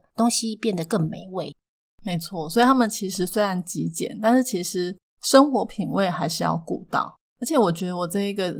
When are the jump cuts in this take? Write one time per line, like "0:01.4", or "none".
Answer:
0:07.3

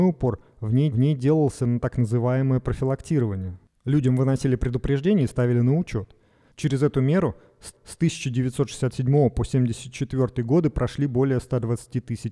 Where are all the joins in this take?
0:00.9
0:07.7

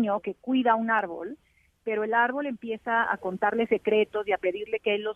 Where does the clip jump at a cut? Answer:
none

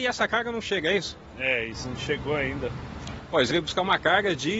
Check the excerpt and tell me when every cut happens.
0:01.8
0:03.5

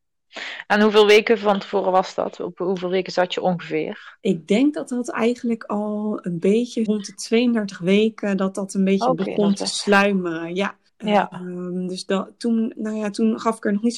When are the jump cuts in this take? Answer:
0:06.9
0:10.9
0:12.8

